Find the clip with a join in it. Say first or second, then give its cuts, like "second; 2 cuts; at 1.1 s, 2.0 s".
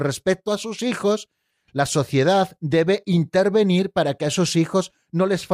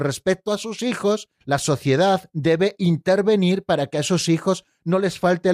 second; 1 cut; at 1.3 s